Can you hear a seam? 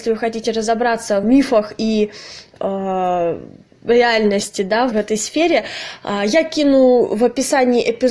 yes; 2 cuts; at 1.2 s, 4.9 s

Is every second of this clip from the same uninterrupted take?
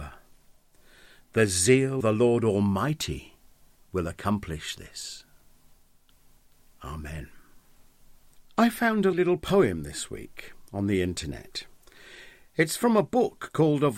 no; 2 cuts; at 2.0 s, 9.1 s

